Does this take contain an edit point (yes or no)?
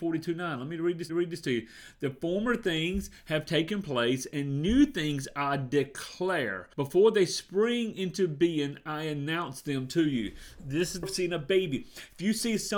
yes